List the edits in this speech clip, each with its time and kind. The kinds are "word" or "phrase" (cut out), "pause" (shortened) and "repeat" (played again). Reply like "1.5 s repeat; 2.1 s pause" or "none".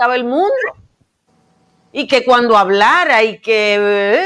none

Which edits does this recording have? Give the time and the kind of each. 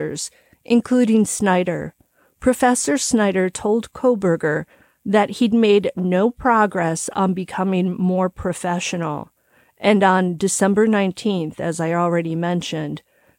none

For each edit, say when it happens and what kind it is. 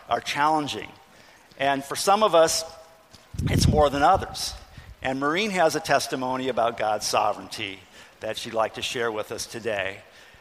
none

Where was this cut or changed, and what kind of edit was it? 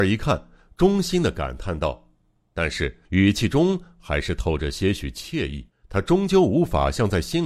3.0 s pause; 5.7 s pause

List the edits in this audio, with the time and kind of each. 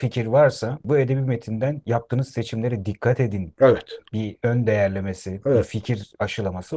none

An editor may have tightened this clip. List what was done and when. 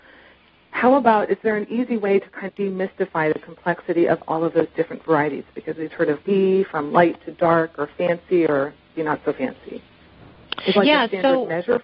2.5 s word; 5.9 s word; 6.2 s phrase; 9.0 s word; 10.8 s word

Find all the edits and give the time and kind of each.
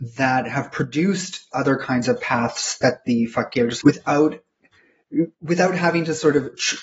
1.5 s word; 3.8 s phrase

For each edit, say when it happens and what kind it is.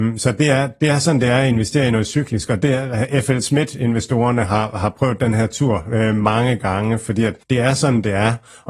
7.4 s pause

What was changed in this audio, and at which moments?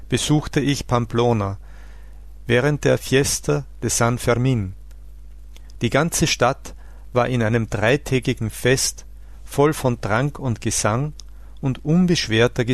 none

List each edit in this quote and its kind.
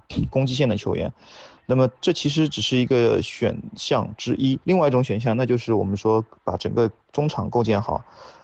4.6 s pause

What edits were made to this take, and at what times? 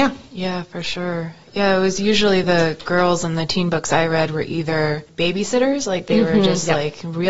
none

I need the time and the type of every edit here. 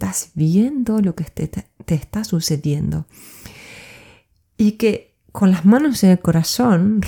none

